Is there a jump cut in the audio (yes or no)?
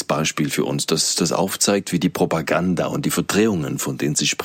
no